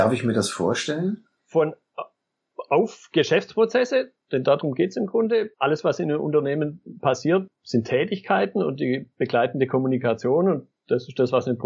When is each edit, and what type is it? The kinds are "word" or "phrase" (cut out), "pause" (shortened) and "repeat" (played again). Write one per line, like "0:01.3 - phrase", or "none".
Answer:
0:05.5 - pause